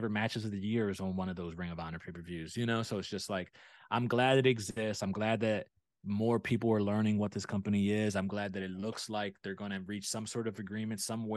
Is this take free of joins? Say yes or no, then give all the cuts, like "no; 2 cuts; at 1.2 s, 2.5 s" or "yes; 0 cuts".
yes; 0 cuts